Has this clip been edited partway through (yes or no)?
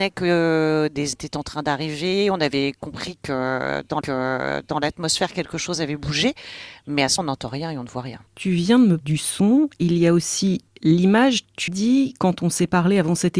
yes